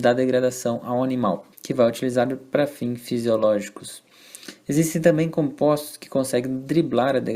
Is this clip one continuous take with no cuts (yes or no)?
no